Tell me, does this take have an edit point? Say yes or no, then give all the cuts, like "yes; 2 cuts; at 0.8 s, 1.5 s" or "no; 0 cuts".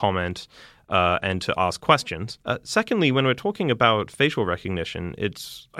yes; 1 cut; at 2.4 s